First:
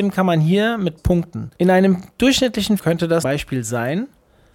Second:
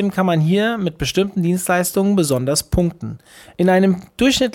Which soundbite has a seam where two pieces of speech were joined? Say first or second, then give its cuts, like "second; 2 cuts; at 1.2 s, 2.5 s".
first; 4 cuts; at 1.0 s, 1.5 s, 2.8 s, 3.2 s